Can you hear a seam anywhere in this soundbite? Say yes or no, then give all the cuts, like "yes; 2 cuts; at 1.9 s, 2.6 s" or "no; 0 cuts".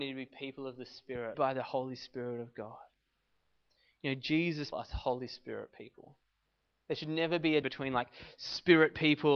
yes; 3 cuts; at 1.3 s, 4.7 s, 7.6 s